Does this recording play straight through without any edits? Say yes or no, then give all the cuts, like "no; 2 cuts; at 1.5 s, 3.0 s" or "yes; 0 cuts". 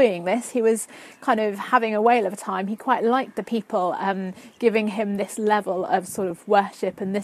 yes; 0 cuts